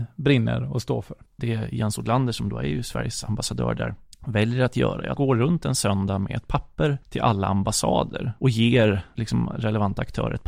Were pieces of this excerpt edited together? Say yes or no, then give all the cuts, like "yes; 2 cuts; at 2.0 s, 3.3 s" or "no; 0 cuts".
yes; 4 cuts; at 1.3 s, 4.1 s, 5.2 s, 7.0 s